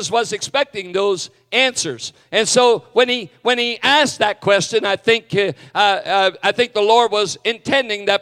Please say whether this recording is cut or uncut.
uncut